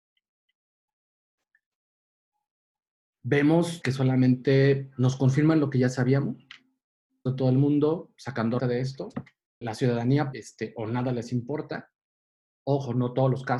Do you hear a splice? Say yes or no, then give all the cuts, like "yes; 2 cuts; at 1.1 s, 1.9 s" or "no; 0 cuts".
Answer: yes; 5 cuts; at 3.8 s, 7.3 s, 8.6 s, 9.6 s, 10.3 s